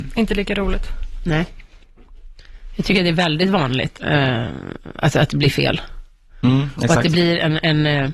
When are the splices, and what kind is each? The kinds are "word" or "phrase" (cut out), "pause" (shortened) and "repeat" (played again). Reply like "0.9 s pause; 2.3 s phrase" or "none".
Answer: 3.9 s phrase